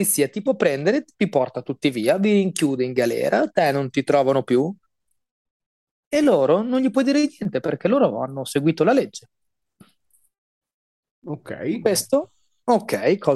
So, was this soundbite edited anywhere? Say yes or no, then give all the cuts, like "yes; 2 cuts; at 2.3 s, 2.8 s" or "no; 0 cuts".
no; 0 cuts